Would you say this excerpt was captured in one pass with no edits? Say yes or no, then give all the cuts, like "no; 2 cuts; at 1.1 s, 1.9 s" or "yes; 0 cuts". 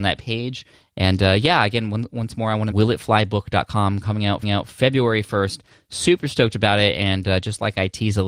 no; 2 cuts; at 2.7 s, 4.4 s